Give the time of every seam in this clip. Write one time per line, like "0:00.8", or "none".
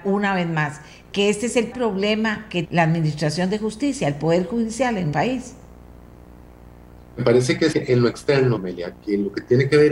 0:01.7
0:02.6
0:05.1
0:07.7
0:08.6